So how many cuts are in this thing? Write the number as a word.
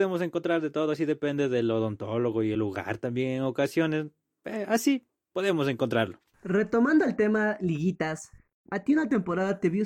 zero